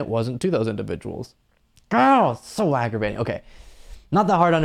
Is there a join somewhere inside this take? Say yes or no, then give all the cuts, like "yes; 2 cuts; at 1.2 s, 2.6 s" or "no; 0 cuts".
yes; 1 cut; at 1.5 s